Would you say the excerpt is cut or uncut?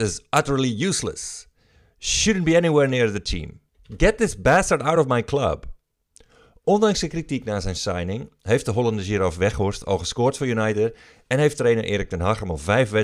uncut